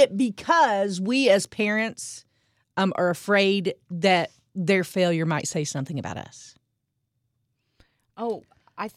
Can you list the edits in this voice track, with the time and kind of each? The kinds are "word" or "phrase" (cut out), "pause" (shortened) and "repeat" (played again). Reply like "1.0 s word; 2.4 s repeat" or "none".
none